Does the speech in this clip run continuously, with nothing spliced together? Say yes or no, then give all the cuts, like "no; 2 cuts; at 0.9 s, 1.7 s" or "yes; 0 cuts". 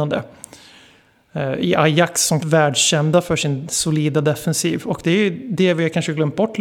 no; 1 cut; at 2.4 s